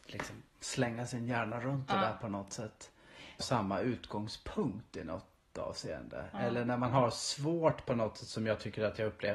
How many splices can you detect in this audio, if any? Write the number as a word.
one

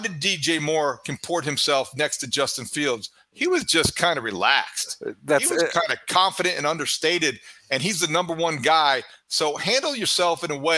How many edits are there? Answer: zero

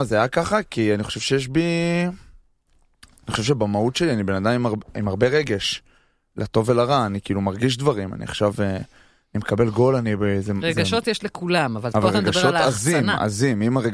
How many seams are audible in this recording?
zero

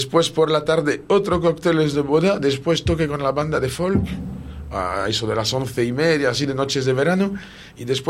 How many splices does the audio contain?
zero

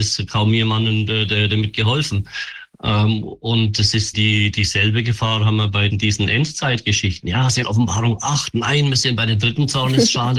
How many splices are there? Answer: three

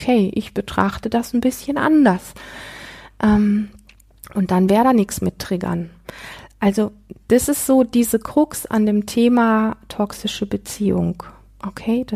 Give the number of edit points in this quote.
zero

